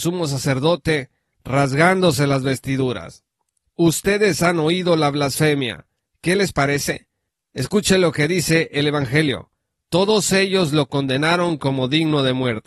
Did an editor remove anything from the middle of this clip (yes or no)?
no